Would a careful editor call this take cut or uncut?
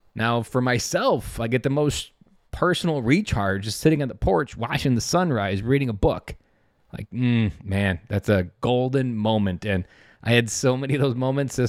uncut